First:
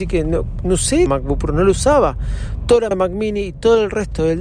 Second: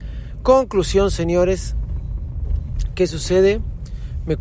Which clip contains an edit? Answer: first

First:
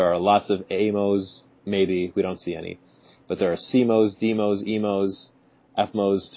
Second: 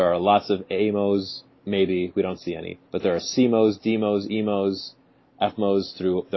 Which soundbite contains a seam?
second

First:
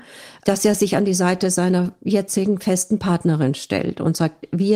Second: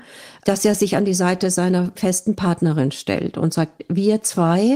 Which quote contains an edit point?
second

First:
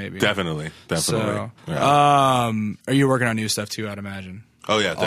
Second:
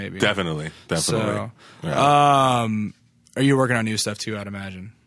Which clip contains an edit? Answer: first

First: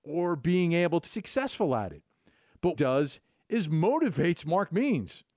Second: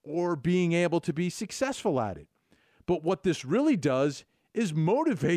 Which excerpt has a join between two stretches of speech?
first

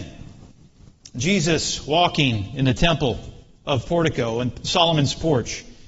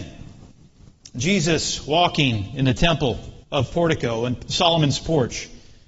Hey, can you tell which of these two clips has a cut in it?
second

